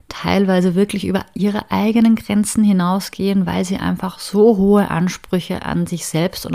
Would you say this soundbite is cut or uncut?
uncut